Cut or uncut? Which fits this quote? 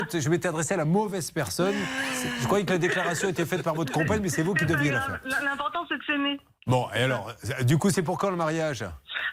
uncut